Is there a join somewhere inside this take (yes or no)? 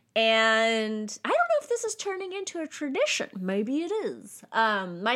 no